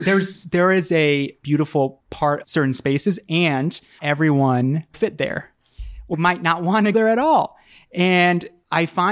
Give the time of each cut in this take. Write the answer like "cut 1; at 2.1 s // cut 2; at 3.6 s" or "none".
cut 1; at 1.4 s // cut 2; at 2.4 s // cut 3; at 4.0 s // cut 4; at 4.9 s // cut 5; at 6.1 s // cut 6; at 6.9 s